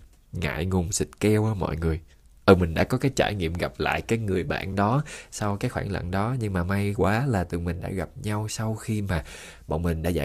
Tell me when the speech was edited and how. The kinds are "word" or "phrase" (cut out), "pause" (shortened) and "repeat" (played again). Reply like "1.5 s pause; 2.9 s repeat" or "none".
none